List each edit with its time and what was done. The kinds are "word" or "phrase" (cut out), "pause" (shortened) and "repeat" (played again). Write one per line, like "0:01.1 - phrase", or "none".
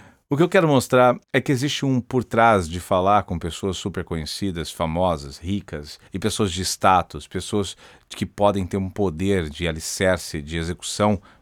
0:01.2 - pause
0:06.1 - pause